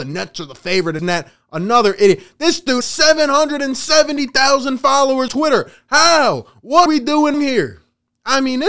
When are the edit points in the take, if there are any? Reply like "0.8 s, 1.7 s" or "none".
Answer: 1.0 s, 2.8 s, 5.3 s, 6.9 s, 7.3 s